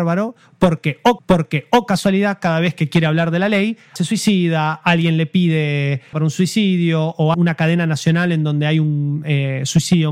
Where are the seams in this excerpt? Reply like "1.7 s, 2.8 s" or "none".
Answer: 1.2 s, 4.0 s, 6.1 s, 7.3 s